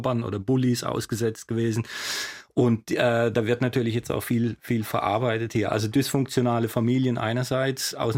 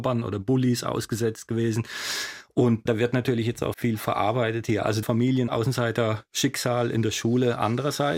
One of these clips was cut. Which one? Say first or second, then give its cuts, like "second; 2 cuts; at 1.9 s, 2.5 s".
second; 4 cuts; at 2.9 s, 3.7 s, 5.0 s, 5.5 s